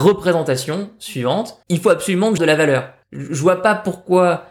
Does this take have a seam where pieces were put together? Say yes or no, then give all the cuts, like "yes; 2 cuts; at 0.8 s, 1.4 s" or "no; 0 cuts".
yes; 3 cuts; at 1.6 s, 2.4 s, 3.0 s